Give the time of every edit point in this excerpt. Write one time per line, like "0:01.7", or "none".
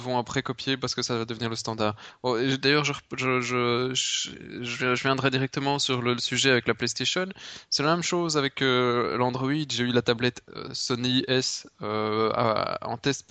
none